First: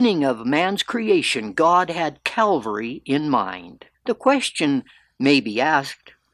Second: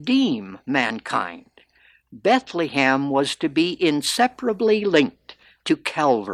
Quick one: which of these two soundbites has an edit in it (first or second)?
first